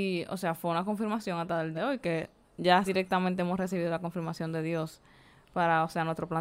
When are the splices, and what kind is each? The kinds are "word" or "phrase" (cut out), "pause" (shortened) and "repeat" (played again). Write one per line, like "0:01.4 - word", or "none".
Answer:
0:01.7 - word
0:02.9 - word